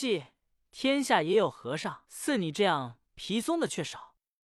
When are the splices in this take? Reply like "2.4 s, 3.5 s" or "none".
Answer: 2.0 s